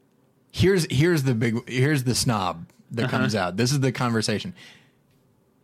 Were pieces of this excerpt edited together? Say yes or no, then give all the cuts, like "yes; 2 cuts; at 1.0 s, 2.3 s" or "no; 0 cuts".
no; 0 cuts